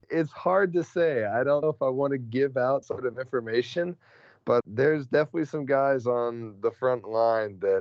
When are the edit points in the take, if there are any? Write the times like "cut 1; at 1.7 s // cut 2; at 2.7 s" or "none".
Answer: cut 1; at 1.6 s // cut 2; at 2.8 s // cut 3; at 4.6 s